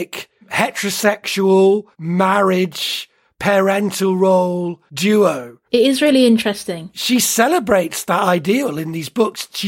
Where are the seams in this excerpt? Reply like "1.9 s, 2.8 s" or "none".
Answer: 1.9 s, 5.7 s